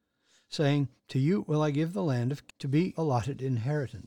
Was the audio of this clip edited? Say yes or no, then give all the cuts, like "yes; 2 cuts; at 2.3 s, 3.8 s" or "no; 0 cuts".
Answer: yes; 3 cuts; at 1.0 s, 2.5 s, 2.9 s